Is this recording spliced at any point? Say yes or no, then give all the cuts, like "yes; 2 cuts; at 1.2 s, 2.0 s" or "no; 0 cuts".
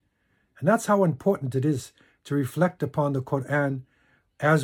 no; 0 cuts